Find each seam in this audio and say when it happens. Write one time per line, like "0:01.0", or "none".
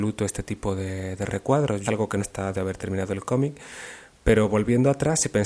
0:01.9
0:02.2
0:02.5